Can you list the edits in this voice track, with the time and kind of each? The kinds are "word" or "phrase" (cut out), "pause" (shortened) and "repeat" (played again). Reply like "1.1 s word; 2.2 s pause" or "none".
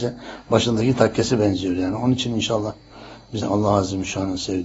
3.4 s phrase